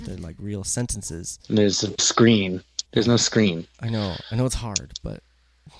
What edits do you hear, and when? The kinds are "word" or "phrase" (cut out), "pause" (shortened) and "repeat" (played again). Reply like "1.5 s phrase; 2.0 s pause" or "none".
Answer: 2.0 s phrase; 2.8 s pause